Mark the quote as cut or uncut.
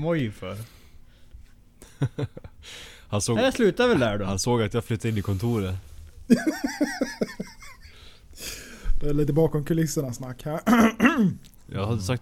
uncut